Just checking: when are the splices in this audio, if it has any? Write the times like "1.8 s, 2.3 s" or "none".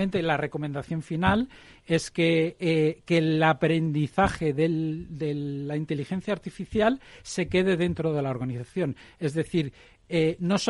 none